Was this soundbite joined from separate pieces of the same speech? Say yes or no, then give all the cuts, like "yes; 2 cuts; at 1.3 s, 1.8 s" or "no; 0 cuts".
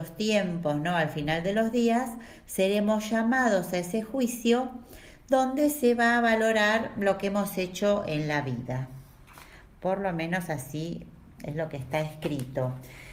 no; 0 cuts